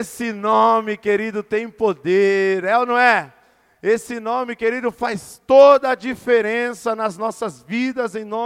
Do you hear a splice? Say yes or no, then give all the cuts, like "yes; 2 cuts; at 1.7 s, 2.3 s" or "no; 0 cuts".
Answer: no; 0 cuts